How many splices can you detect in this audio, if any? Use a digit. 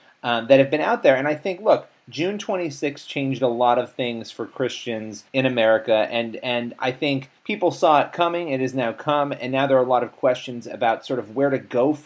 2